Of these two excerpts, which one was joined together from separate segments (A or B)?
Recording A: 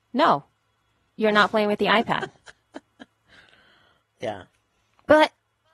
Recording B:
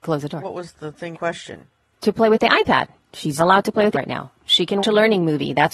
B